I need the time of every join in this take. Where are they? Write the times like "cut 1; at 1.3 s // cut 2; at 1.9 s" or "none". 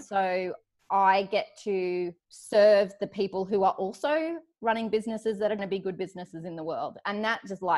cut 1; at 2.2 s // cut 2; at 5.6 s